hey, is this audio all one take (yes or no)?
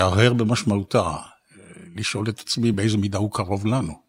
yes